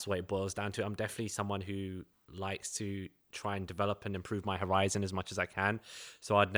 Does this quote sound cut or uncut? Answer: uncut